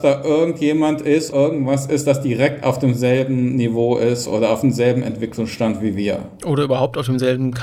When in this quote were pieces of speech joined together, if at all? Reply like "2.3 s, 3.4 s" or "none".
1.3 s

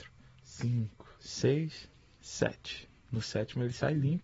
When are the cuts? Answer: 1.1 s, 3.0 s

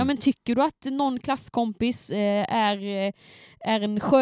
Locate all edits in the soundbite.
none

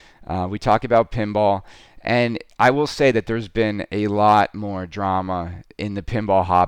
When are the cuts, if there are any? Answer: none

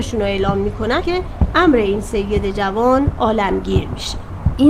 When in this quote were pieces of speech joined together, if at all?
1.0 s

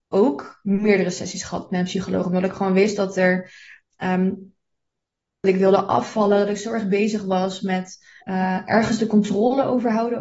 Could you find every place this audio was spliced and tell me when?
5.4 s, 8.2 s

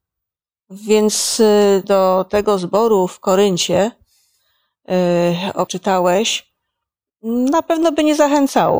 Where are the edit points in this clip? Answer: 1.8 s, 5.7 s

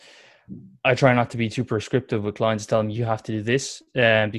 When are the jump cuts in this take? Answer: none

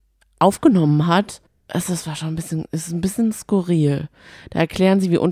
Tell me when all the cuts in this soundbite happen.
1.5 s

